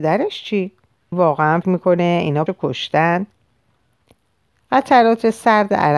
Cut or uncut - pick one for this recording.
cut